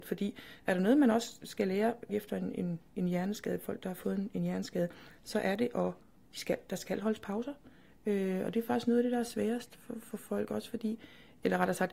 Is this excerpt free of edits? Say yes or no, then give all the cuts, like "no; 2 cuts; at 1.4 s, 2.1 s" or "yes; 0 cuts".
no; 1 cut; at 2.1 s